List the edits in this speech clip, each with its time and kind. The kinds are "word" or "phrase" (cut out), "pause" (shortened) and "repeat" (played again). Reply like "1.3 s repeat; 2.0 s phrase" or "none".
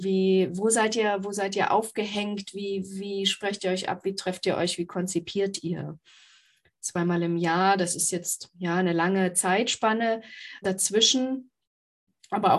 10.6 s word